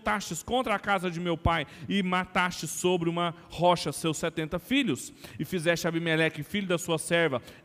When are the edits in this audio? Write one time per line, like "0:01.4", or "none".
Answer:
none